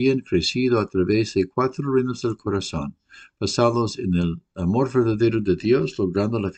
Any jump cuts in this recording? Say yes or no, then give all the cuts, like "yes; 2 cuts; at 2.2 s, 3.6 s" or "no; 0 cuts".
no; 0 cuts